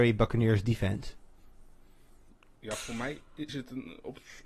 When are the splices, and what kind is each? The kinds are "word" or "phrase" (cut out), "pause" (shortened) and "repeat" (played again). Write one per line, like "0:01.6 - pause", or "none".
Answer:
0:03.5 - phrase